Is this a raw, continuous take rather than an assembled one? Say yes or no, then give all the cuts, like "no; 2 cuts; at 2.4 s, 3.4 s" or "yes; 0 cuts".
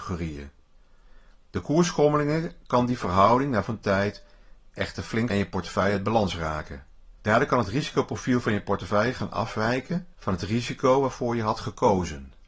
no; 4 cuts; at 3.6 s, 5.3 s, 7.2 s, 10.1 s